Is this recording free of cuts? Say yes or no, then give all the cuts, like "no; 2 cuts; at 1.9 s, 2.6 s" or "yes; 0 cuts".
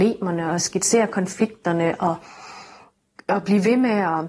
yes; 0 cuts